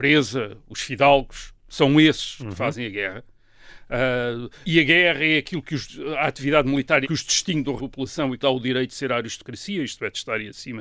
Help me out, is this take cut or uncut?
cut